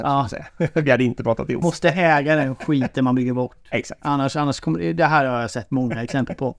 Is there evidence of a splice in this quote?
yes; 1 cut; at 1.6 s

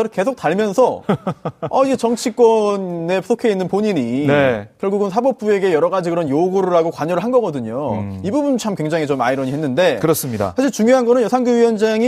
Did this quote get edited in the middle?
no; 0 cuts

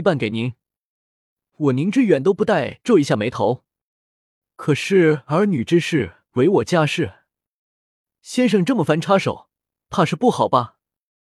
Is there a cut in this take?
no; 0 cuts

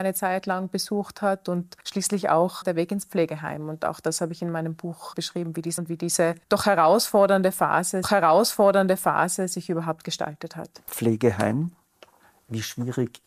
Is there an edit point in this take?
yes; 7 cuts; at 1.8 s, 2.6 s, 5.1 s, 5.8 s, 6.4 s, 8.0 s, 10.8 s

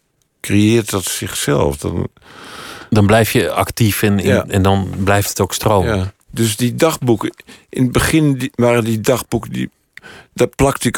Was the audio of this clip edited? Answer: yes; 1 cut; at 6.2 s

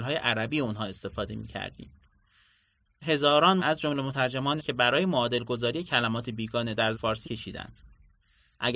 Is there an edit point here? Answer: yes; 5 cuts; at 3.0 s, 3.6 s, 4.6 s, 6.9 s, 7.2 s

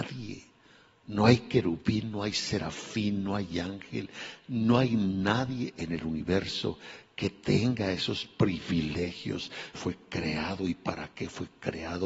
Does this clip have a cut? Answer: yes; 1 cut; at 9.7 s

